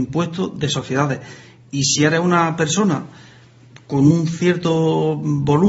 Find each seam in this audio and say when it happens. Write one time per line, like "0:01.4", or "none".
none